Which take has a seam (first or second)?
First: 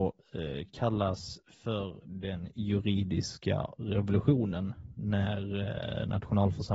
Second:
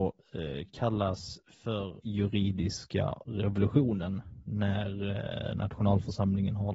second